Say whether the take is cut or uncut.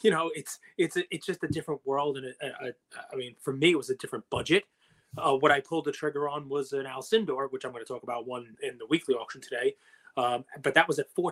cut